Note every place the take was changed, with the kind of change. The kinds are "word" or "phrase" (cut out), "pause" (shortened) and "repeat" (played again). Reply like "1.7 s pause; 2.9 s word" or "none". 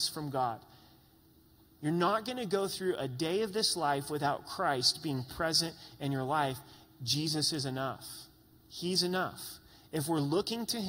none